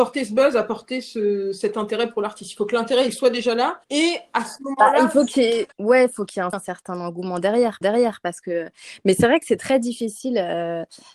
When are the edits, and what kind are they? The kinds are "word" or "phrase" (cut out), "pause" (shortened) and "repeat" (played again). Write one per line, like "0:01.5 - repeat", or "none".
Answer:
0:03.8 - pause
0:05.7 - pause
0:06.5 - phrase
0:07.8 - repeat